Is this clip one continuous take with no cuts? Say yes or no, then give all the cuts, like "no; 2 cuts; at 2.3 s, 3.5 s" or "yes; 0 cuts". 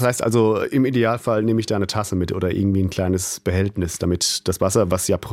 yes; 0 cuts